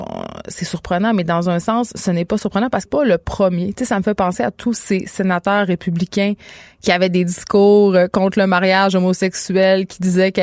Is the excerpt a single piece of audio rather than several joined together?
no; 1 cut; at 2.9 s

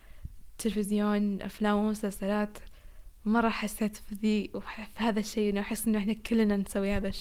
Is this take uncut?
yes; 0 cuts

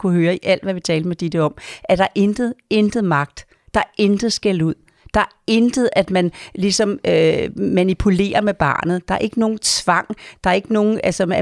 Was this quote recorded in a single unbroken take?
yes; 0 cuts

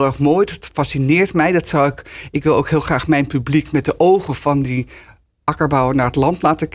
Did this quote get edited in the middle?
no; 0 cuts

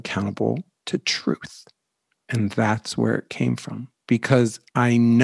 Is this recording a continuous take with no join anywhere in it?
yes; 0 cuts

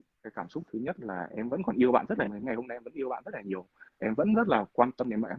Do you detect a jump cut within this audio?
yes; 1 cut; at 2.3 s

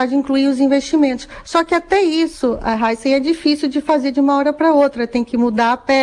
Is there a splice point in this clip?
no; 0 cuts

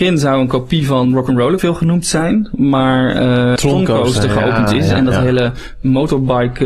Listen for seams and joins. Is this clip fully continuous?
no; 2 cuts; at 1.6 s, 3.6 s

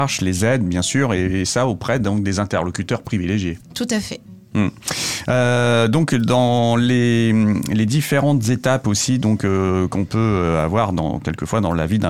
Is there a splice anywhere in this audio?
yes; 1 cut; at 3.6 s

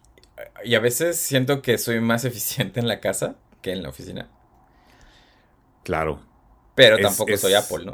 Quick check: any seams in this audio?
no; 0 cuts

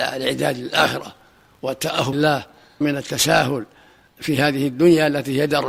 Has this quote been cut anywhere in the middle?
yes; 2 cuts; at 2.1 s, 2.8 s

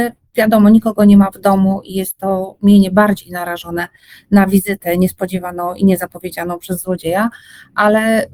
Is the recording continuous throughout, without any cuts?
yes; 0 cuts

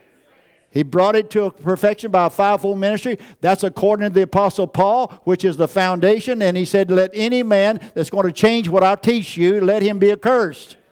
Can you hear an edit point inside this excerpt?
no; 0 cuts

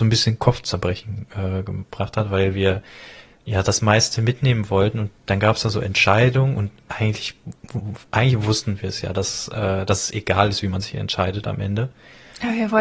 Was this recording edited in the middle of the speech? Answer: no; 0 cuts

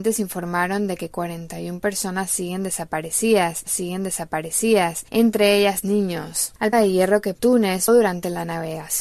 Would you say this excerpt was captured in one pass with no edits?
no; 5 cuts; at 3.7 s, 5.8 s, 6.7 s, 7.3 s, 7.9 s

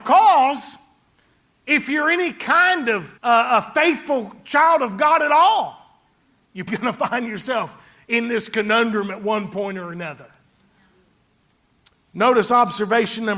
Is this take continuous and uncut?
no; 2 cuts; at 3.2 s, 6.7 s

